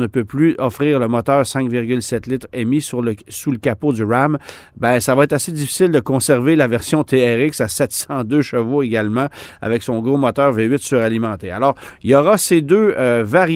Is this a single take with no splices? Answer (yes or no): yes